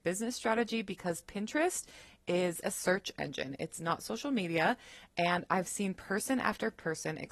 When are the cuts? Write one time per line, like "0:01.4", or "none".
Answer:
0:02.6